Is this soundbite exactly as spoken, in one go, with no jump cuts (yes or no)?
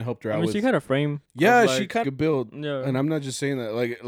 no